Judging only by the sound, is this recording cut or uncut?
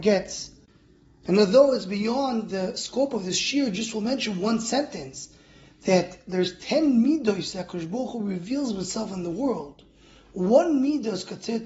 uncut